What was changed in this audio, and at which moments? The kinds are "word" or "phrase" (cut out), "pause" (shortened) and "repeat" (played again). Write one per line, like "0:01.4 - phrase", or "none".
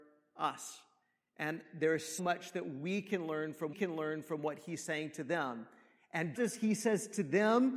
0:02.2 - word
0:03.7 - repeat
0:06.4 - word